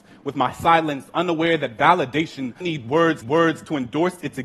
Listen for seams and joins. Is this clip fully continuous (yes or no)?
no